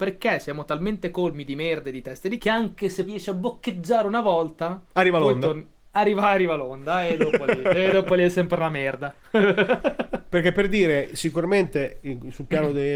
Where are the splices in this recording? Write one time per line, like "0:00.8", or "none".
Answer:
0:02.4
0:03.1
0:04.9